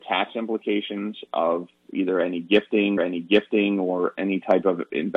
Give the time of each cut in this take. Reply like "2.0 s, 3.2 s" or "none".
3.0 s